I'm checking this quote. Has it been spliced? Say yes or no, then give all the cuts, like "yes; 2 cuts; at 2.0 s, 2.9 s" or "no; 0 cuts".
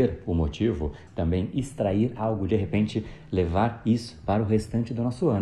yes; 2 cuts; at 1.1 s, 2.5 s